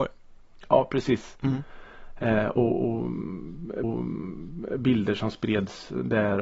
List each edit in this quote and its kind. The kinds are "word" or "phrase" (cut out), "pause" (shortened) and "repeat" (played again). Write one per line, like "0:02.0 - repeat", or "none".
0:03.8 - repeat